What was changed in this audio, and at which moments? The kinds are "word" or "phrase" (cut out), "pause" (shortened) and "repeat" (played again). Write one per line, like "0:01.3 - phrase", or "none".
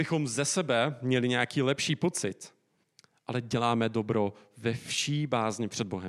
0:02.8 - pause